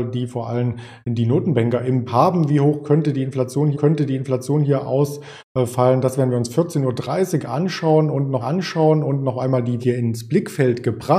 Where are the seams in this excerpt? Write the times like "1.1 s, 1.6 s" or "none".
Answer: 2.1 s, 3.7 s, 8.4 s, 9.8 s